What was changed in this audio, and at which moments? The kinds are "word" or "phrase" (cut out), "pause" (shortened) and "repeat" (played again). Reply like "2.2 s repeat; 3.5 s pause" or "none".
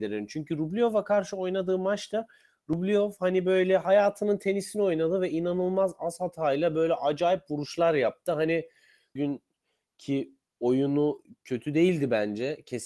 9.2 s phrase